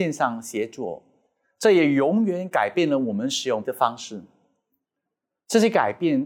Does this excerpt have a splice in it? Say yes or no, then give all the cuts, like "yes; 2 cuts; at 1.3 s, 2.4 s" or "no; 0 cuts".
yes; 1 cut; at 3.6 s